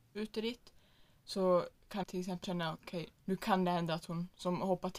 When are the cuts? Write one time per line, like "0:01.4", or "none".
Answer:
0:02.0
0:02.4
0:03.1